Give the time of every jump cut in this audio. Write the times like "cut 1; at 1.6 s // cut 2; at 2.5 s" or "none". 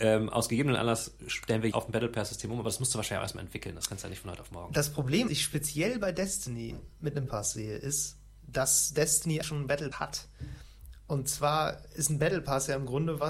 cut 1; at 1.7 s // cut 2; at 5.3 s // cut 3; at 7.3 s // cut 4; at 9.4 s // cut 5; at 9.9 s